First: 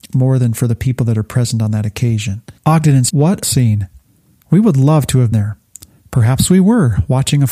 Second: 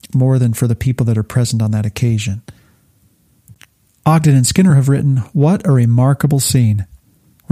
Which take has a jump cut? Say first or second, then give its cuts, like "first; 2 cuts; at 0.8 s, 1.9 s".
first; 4 cuts; at 2.6 s, 3.1 s, 3.4 s, 5.3 s